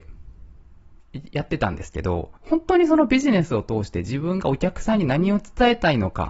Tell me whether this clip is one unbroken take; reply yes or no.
no